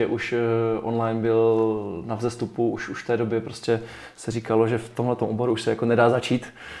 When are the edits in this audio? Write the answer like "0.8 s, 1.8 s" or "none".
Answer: none

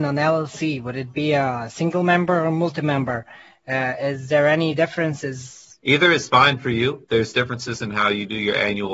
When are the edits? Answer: 5.8 s

